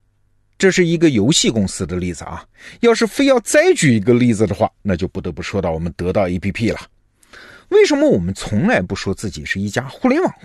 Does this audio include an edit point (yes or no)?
no